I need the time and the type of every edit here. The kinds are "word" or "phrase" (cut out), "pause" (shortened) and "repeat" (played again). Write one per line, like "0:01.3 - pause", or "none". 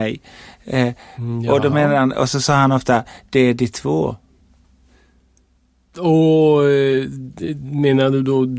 none